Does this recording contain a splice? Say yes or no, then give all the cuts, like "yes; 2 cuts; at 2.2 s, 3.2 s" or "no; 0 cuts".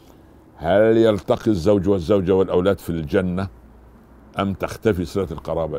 no; 0 cuts